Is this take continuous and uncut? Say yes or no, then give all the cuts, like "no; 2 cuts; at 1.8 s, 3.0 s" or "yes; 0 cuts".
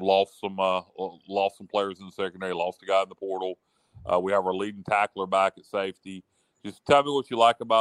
yes; 0 cuts